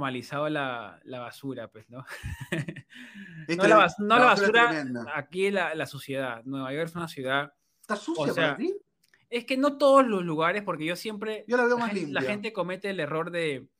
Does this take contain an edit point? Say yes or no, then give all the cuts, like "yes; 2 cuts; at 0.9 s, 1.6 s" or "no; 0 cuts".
no; 0 cuts